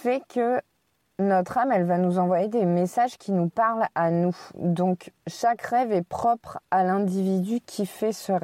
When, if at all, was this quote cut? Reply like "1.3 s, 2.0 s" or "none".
5.2 s